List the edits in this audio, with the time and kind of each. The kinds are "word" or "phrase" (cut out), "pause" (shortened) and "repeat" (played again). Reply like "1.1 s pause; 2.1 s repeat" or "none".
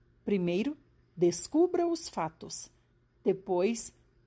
none